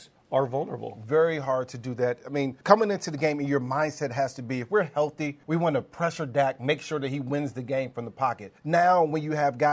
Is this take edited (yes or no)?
yes